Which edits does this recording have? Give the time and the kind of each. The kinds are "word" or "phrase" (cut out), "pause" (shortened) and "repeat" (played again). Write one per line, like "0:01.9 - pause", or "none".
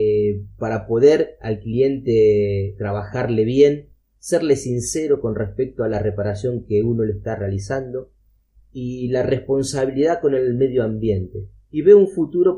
none